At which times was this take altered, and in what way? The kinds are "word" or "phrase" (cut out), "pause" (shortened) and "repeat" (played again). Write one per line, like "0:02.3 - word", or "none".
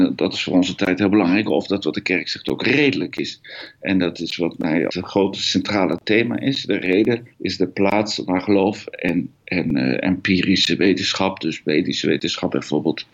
0:04.9 - word
0:07.3 - pause
0:09.3 - pause